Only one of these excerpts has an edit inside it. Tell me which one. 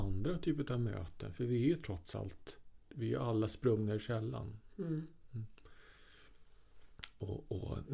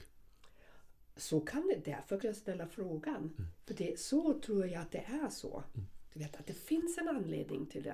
second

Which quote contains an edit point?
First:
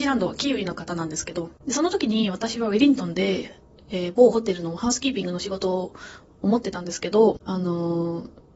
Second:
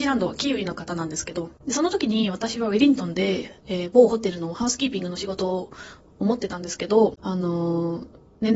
second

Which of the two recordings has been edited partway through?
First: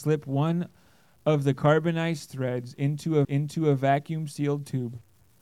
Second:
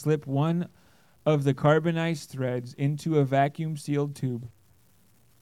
first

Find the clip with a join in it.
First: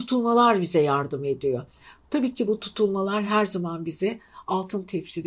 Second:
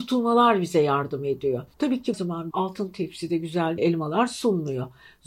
second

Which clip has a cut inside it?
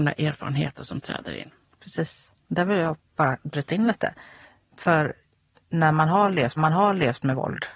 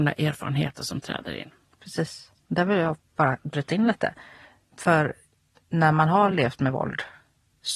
first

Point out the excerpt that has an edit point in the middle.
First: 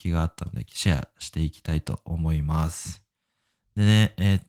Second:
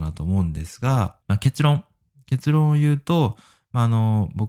second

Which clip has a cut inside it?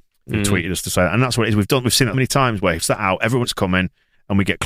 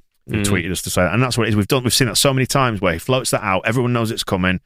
first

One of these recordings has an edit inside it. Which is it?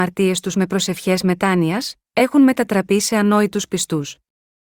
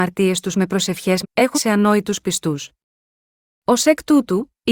second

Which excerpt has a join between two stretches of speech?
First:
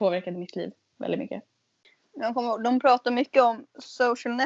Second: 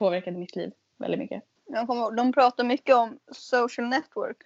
second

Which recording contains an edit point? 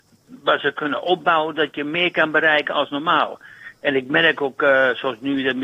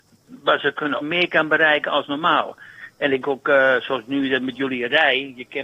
second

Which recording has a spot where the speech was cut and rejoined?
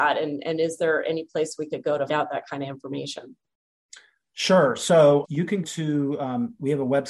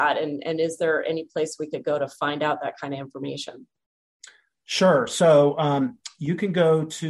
first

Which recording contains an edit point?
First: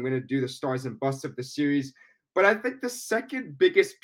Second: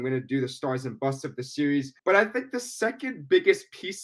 second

